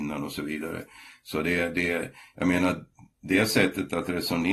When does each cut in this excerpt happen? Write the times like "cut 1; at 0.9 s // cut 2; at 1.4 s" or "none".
none

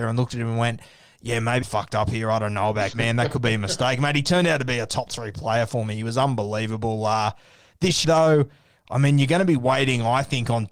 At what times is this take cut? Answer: cut 1; at 1.6 s // cut 2; at 2.9 s // cut 3; at 8.0 s

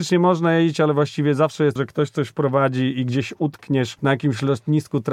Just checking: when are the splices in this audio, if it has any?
cut 1; at 1.8 s

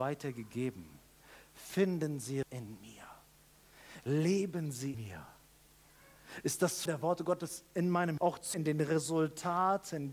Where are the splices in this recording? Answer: cut 1; at 2.4 s // cut 2; at 4.9 s // cut 3; at 6.9 s // cut 4; at 8.2 s // cut 5; at 8.5 s

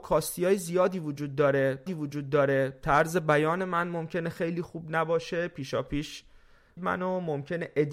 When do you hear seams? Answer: cut 1; at 1.9 s // cut 2; at 6.8 s

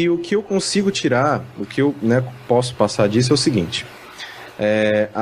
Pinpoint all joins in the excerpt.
none

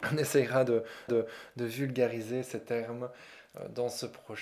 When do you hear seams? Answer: cut 1; at 1.1 s

